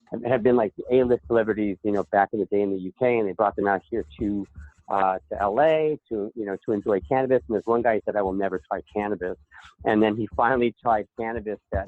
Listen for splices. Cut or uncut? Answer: uncut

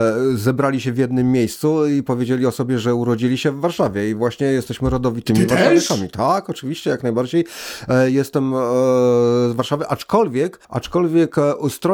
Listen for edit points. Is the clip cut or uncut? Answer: cut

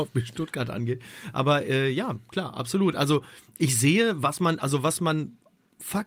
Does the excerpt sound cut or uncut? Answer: uncut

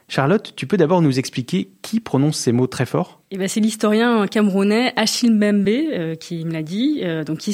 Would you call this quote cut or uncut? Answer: uncut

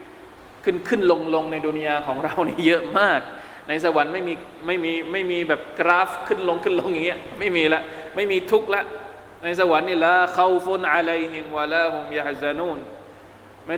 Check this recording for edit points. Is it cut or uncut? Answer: uncut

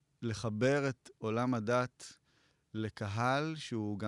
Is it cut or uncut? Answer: uncut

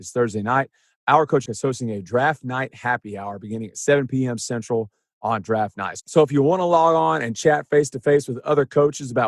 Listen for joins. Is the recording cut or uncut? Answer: cut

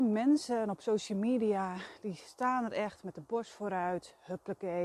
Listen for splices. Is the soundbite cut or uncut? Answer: uncut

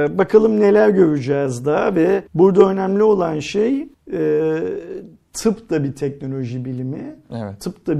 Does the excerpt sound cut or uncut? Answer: cut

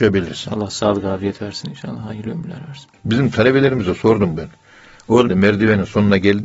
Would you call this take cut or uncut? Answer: cut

